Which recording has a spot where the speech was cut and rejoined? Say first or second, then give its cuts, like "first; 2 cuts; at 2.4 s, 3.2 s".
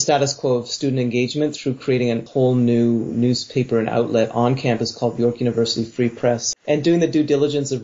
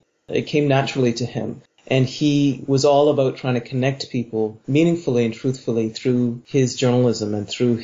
first; 1 cut; at 6.6 s